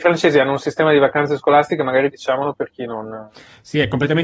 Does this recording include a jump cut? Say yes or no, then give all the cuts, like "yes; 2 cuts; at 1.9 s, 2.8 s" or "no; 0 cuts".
no; 0 cuts